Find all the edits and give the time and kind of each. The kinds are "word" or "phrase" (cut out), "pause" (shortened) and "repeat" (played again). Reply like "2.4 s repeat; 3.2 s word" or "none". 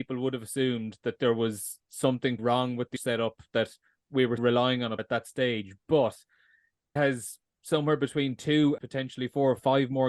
2.4 s word; 3.0 s word; 4.4 s word; 5.0 s word; 7.0 s word; 8.8 s word